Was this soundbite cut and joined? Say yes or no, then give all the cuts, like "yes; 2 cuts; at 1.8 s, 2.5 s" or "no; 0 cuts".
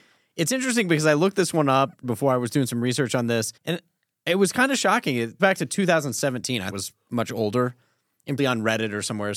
yes; 5 cuts; at 2.0 s, 3.6 s, 5.4 s, 6.7 s, 8.4 s